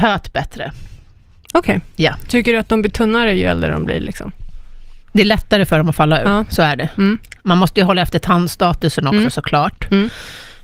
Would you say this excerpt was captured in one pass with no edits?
yes; 0 cuts

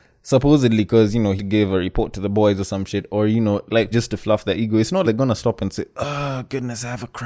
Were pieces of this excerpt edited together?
yes; 3 cuts; at 1.4 s, 3.9 s, 5.0 s

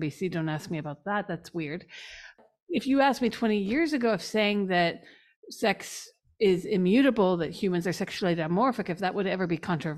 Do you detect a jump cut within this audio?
no; 0 cuts

